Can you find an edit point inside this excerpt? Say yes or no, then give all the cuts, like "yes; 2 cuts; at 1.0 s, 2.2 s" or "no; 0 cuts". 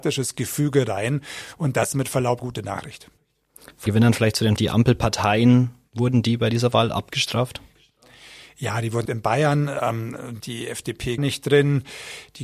yes; 7 cuts; at 1.9 s, 2.4 s, 3.9 s, 4.6 s, 9.0 s, 10.4 s, 11.2 s